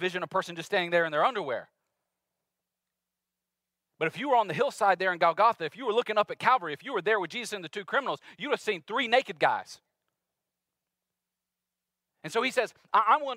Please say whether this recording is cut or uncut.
uncut